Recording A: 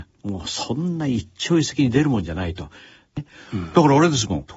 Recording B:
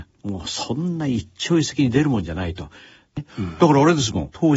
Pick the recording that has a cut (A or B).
B